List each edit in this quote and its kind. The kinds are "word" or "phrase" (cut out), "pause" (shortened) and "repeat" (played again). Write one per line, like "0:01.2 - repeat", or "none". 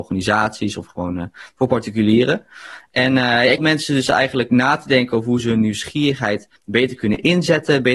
0:03.6 - word
0:06.6 - pause